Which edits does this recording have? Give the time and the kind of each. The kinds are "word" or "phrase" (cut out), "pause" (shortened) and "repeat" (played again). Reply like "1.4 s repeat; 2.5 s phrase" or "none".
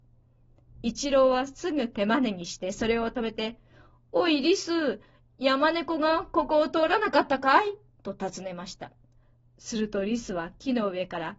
none